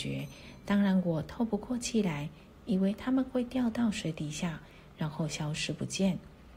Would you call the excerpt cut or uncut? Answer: uncut